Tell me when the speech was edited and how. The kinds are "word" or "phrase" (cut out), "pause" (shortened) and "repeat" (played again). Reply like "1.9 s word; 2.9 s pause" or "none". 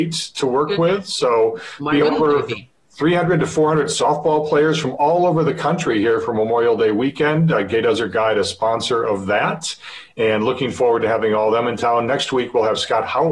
none